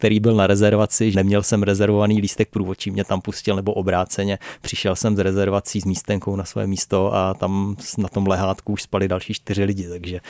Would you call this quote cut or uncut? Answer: cut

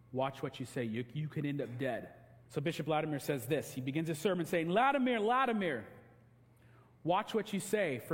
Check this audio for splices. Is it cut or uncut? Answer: cut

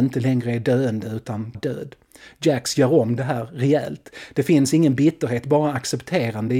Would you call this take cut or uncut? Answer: cut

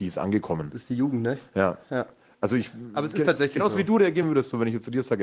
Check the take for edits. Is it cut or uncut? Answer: uncut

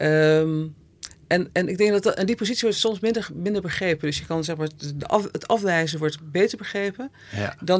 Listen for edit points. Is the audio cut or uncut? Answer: uncut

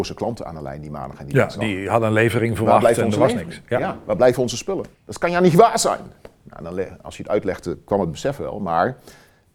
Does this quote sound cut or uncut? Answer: cut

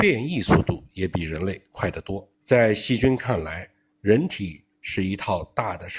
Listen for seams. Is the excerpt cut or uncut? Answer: cut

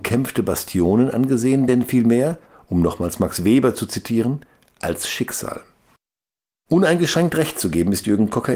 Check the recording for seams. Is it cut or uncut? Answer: uncut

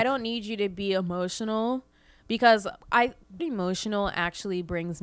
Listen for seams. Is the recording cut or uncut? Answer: cut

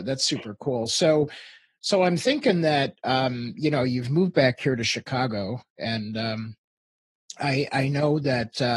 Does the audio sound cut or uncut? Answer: uncut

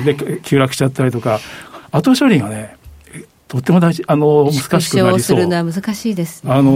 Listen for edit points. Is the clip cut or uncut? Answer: uncut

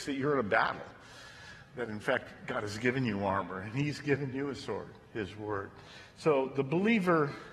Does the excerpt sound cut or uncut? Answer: uncut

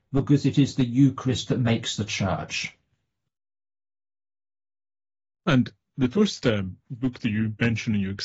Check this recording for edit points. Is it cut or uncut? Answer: uncut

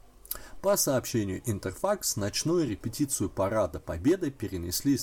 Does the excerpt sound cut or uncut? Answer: uncut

